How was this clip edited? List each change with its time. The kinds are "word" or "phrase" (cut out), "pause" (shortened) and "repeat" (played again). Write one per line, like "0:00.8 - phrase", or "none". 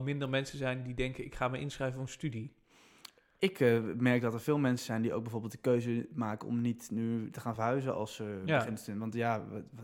none